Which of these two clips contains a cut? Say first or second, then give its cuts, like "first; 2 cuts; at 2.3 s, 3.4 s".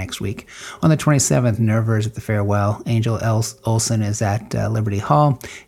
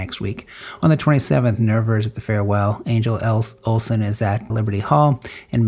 second; 1 cut; at 4.5 s